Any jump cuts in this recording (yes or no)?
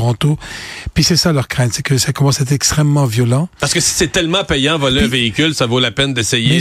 no